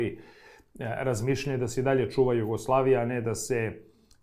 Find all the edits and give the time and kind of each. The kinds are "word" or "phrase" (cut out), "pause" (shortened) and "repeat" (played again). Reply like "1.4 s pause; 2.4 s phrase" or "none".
none